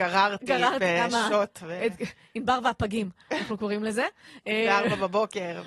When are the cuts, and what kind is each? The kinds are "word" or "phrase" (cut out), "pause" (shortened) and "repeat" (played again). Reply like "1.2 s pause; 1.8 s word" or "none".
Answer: none